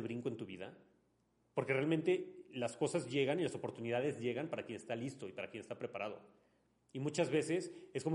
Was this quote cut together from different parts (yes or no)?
no